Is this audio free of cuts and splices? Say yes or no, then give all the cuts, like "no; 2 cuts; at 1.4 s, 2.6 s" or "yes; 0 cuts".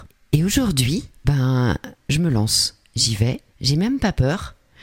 no; 2 cuts; at 1.2 s, 3.5 s